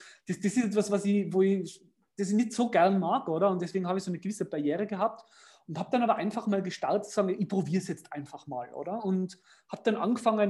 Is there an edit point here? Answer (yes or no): no